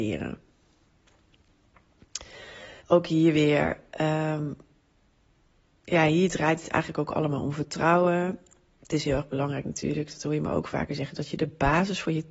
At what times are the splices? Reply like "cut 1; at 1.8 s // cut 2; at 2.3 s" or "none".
cut 1; at 2.8 s